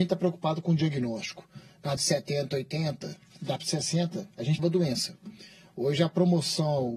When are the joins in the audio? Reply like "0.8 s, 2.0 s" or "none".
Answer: 2.0 s, 3.6 s, 4.6 s